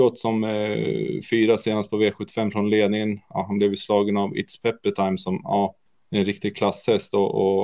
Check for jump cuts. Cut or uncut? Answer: cut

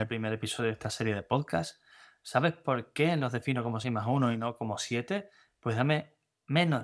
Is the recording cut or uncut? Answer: uncut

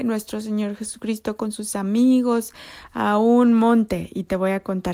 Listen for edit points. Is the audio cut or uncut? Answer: uncut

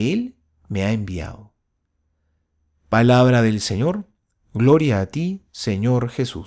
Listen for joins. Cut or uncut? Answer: uncut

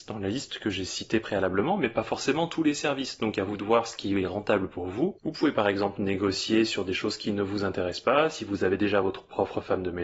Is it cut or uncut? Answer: uncut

